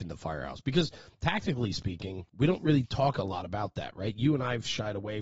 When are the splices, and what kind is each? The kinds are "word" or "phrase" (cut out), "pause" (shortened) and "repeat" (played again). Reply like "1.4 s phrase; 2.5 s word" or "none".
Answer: 2.3 s pause